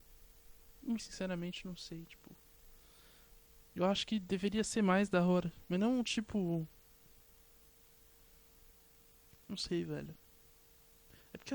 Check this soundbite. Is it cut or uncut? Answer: cut